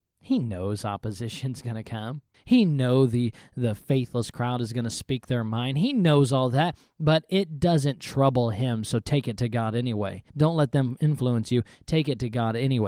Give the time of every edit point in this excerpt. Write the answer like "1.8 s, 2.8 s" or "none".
2.3 s, 10.3 s

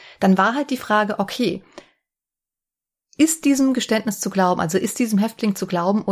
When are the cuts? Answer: none

